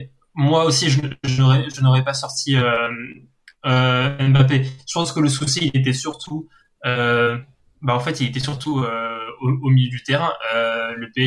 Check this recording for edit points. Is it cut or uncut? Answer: uncut